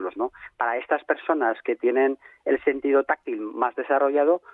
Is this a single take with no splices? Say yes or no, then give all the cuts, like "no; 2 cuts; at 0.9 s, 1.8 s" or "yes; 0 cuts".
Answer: yes; 0 cuts